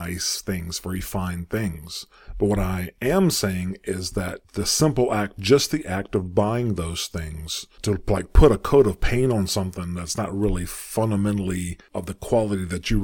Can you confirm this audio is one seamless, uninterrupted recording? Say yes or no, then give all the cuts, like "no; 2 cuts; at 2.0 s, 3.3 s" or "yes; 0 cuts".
yes; 0 cuts